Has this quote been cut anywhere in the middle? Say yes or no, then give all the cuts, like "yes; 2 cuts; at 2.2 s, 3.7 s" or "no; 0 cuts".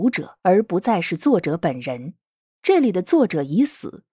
no; 0 cuts